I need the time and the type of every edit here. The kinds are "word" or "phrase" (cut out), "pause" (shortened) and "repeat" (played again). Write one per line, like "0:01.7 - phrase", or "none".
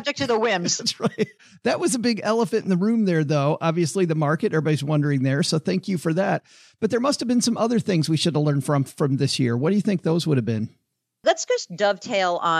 none